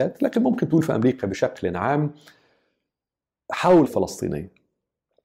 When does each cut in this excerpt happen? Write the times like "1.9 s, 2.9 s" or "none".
3.8 s